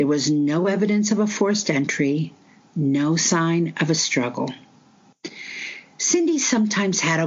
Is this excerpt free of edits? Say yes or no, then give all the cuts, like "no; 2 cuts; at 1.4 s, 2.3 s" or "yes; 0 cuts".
yes; 0 cuts